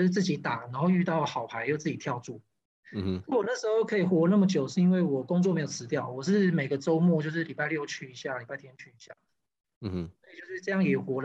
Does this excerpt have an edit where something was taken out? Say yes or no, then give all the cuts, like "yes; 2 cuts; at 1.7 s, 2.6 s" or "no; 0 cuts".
no; 0 cuts